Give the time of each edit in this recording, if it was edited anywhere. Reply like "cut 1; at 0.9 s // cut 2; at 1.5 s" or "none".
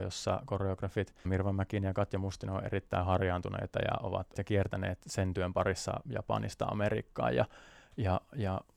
cut 1; at 1.2 s // cut 2; at 4.3 s